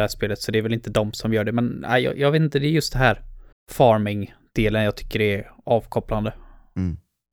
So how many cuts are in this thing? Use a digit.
1